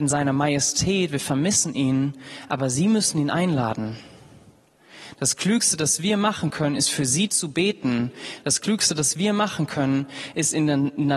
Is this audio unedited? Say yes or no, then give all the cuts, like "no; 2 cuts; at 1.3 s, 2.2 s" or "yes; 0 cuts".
yes; 0 cuts